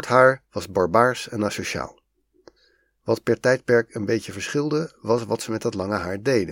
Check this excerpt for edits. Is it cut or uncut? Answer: uncut